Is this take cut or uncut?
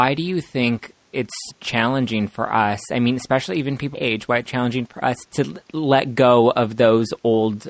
cut